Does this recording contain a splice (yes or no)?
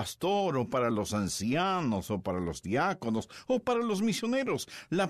no